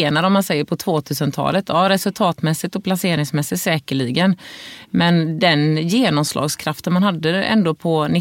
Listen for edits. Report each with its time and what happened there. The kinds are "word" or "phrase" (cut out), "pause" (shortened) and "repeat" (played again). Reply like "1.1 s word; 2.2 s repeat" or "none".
none